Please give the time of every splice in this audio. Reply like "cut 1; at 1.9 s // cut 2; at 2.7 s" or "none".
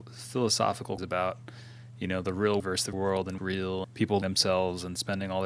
cut 1; at 1.0 s // cut 2; at 2.6 s // cut 3; at 2.9 s // cut 4; at 3.4 s // cut 5; at 3.8 s // cut 6; at 4.2 s